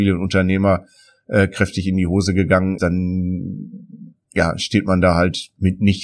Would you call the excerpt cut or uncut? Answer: cut